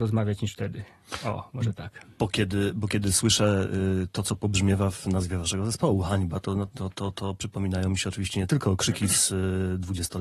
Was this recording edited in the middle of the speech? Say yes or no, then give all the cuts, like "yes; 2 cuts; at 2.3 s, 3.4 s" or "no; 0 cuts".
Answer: no; 0 cuts